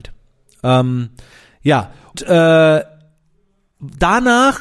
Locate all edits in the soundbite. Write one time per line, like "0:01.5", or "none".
0:02.1